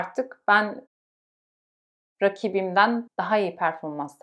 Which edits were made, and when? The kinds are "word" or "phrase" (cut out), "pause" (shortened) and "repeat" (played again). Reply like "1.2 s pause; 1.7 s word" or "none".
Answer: 3.1 s phrase